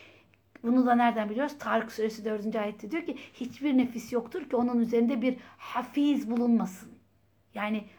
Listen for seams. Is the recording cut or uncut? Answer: uncut